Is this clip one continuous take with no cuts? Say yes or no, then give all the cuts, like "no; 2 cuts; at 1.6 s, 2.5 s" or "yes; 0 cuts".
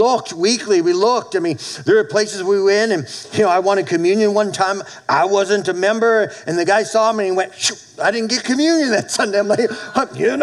yes; 0 cuts